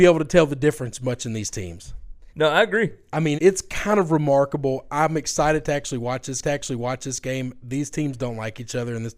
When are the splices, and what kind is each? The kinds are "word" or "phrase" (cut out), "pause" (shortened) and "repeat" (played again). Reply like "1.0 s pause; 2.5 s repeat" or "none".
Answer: 2.3 s pause; 3.3 s word; 6.4 s repeat